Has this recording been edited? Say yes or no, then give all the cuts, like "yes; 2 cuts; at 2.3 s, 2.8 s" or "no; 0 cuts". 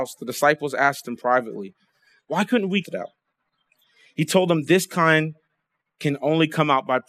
yes; 1 cut; at 2.8 s